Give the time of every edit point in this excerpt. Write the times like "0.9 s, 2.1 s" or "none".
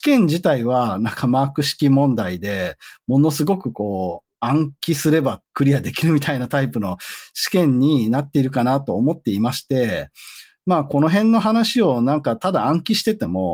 5.4 s